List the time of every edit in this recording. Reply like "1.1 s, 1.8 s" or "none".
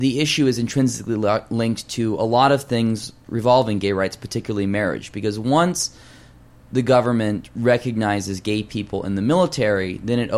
none